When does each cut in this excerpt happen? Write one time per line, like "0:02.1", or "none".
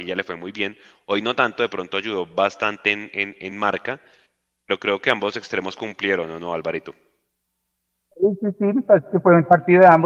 none